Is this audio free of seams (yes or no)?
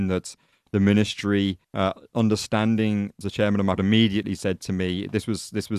no